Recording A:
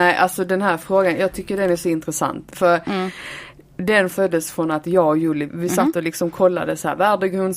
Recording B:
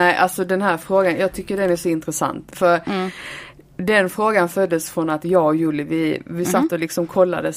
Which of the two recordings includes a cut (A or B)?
A